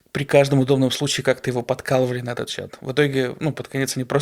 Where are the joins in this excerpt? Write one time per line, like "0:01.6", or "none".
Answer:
none